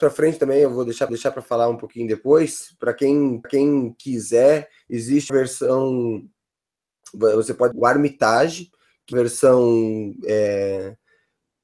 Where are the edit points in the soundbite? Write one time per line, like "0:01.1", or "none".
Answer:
0:01.1
0:03.4
0:05.3
0:07.7
0:09.1